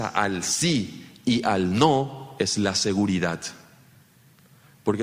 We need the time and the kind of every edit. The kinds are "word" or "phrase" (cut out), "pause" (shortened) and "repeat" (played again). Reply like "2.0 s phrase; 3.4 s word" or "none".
none